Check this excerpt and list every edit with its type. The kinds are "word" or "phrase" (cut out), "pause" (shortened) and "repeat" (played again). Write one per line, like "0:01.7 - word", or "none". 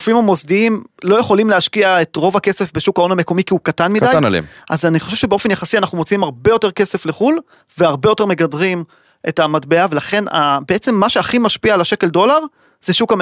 none